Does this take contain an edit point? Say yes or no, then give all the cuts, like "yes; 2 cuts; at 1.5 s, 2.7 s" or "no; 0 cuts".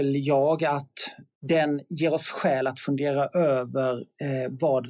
no; 0 cuts